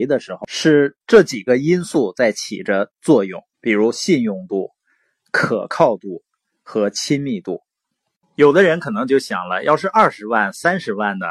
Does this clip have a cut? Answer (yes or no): yes